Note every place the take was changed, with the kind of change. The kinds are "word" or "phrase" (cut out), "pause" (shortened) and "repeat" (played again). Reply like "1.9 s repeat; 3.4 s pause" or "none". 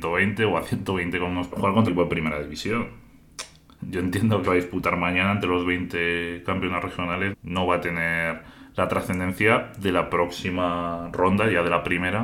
1.5 s phrase; 1.9 s word; 3.8 s word; 4.4 s phrase; 7.3 s word